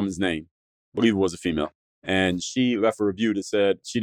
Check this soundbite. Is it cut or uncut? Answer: uncut